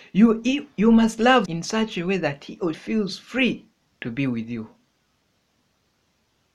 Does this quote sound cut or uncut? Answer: cut